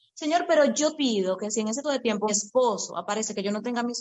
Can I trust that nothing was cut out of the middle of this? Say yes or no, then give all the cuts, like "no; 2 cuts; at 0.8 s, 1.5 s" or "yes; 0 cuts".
no; 3 cuts; at 0.9 s, 1.8 s, 2.3 s